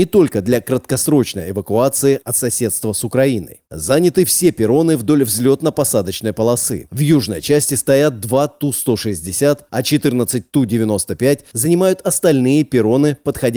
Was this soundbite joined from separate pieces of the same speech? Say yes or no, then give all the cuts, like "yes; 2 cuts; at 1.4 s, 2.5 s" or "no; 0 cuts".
no; 0 cuts